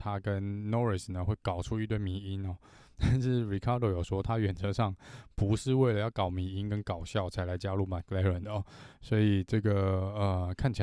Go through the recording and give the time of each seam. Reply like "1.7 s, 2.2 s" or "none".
none